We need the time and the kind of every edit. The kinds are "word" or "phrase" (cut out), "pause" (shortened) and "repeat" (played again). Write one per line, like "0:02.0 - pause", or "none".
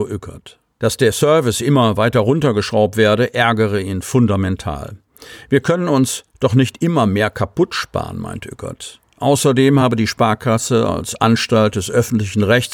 none